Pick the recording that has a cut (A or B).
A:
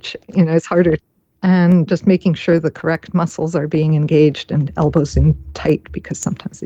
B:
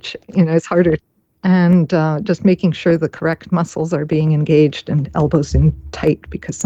A